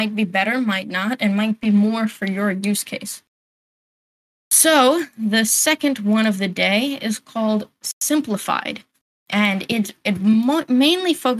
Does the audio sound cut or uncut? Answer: uncut